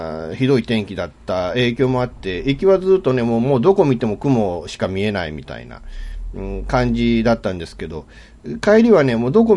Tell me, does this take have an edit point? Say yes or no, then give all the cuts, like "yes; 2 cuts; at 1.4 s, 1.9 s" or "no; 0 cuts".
no; 0 cuts